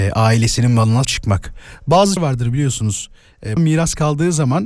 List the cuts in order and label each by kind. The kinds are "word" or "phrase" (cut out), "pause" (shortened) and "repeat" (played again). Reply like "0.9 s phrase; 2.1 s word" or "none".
1.0 s word; 2.2 s word; 3.6 s word